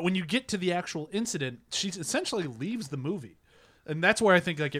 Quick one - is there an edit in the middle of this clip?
no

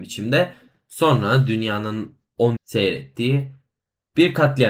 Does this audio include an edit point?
yes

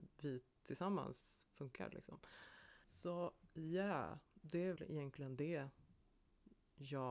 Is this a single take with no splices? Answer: no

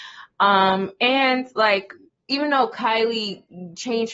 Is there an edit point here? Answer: no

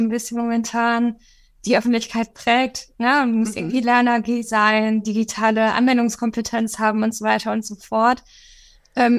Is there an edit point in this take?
no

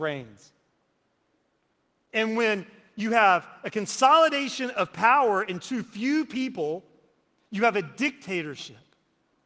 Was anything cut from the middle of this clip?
no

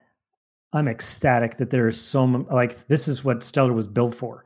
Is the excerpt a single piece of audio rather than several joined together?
yes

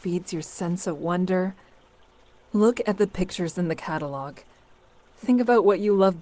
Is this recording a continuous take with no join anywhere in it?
yes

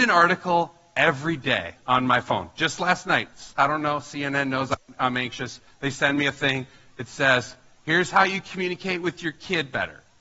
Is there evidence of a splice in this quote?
no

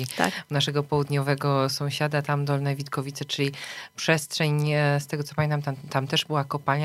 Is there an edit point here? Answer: no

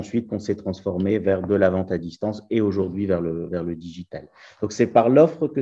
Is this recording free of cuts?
yes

